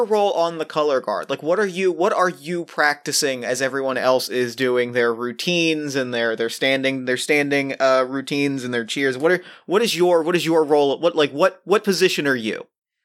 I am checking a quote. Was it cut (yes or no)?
no